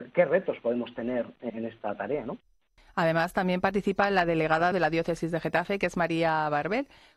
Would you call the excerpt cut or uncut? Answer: cut